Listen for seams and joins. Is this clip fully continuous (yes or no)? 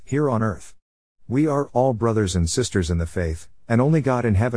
yes